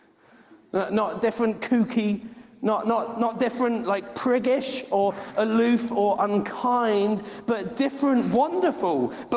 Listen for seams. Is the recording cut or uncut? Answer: uncut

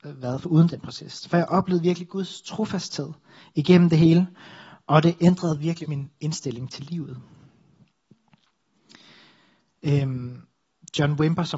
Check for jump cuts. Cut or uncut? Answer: cut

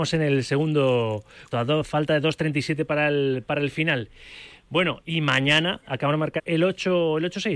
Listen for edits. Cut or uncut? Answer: cut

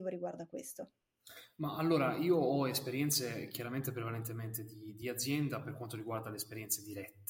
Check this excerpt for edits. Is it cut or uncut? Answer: uncut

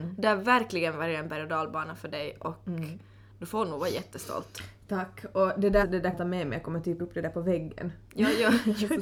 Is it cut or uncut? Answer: cut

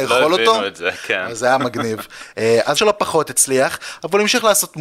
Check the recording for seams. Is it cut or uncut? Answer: cut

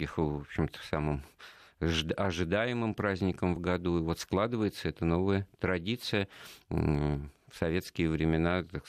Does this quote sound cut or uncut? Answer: uncut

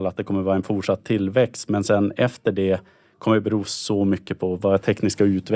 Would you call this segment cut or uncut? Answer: uncut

